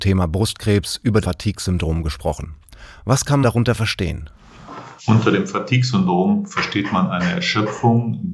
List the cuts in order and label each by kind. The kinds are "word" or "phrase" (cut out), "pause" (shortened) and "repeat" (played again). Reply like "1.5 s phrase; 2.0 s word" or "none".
1.2 s word; 3.4 s word; 5.0 s pause